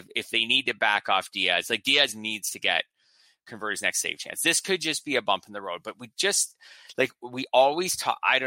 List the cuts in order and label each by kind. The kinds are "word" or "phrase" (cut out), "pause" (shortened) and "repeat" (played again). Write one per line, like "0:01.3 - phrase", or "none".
none